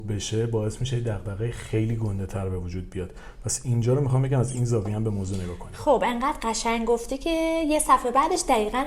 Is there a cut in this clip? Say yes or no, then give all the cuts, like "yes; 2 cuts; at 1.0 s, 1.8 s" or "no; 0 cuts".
no; 0 cuts